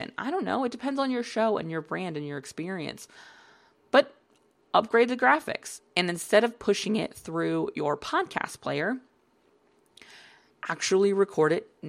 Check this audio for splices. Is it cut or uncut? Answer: uncut